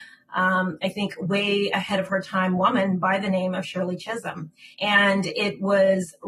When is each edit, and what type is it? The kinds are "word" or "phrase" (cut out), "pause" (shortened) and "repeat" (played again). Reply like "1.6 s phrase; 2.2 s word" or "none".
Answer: 4.7 s pause